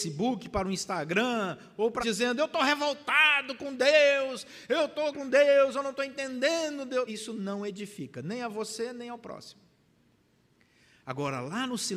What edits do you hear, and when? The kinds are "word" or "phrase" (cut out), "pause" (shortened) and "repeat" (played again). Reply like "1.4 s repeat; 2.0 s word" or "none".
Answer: 2.0 s word; 5.1 s word; 7.1 s word